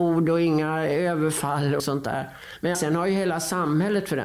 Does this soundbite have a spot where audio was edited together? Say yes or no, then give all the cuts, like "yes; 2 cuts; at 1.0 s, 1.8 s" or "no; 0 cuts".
yes; 2 cuts; at 1.8 s, 2.7 s